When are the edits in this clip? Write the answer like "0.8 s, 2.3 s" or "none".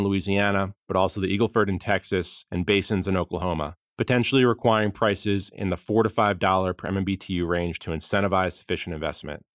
none